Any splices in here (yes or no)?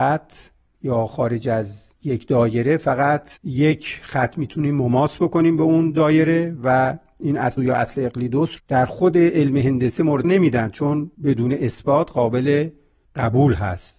yes